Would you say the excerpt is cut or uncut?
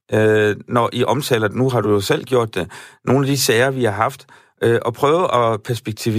uncut